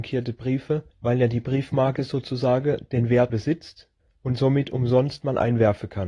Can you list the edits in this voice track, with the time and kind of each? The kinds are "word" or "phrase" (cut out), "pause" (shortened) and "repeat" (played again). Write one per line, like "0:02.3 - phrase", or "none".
0:00.9 - pause
0:03.3 - word
0:04.0 - pause